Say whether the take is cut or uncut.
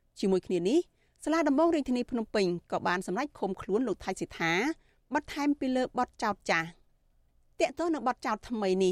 uncut